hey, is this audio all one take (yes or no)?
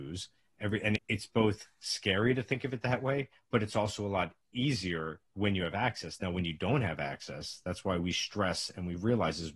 yes